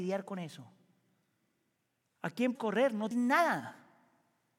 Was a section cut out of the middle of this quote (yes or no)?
yes